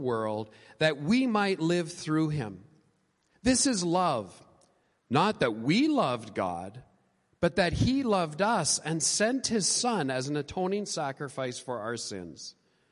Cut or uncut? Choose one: uncut